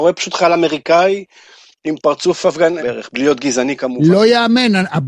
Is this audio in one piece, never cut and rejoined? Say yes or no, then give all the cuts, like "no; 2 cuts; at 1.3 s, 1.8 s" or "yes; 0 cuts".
no; 1 cut; at 2.8 s